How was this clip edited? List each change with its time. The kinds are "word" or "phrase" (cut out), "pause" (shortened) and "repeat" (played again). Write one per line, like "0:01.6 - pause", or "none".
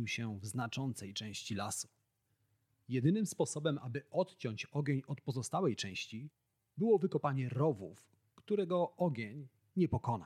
none